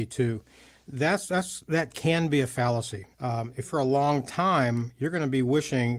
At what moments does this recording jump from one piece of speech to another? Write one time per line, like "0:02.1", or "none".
0:03.1
0:03.6